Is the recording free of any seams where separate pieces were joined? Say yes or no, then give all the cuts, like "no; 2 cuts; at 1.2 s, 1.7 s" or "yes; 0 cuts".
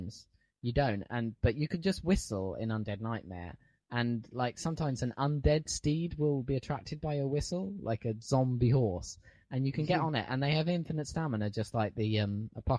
yes; 0 cuts